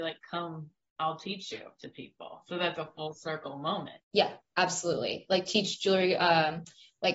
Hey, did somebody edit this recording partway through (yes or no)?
yes